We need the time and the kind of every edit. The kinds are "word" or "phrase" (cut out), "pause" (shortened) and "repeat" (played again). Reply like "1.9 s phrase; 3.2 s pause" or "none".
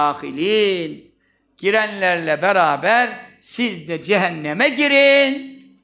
none